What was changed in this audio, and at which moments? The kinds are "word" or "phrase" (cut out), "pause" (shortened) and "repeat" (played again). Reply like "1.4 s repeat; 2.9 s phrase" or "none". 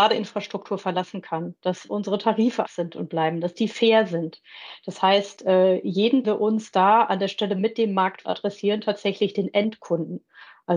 2.6 s word; 6.2 s phrase; 8.2 s phrase